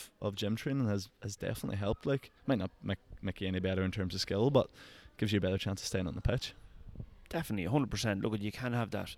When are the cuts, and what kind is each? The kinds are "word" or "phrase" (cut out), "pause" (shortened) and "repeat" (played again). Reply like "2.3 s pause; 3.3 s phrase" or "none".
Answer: 2.4 s pause